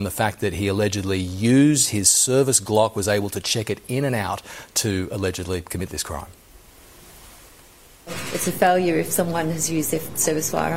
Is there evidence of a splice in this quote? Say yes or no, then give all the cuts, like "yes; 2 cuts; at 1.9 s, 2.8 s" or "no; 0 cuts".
no; 0 cuts